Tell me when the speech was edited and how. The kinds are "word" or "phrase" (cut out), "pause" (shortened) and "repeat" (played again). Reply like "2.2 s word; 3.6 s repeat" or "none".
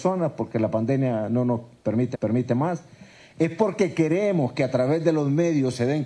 2.1 s repeat